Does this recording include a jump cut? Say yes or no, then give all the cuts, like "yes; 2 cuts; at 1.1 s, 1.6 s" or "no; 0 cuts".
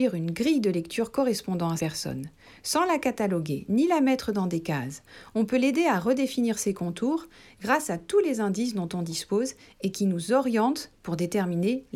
yes; 1 cut; at 1.8 s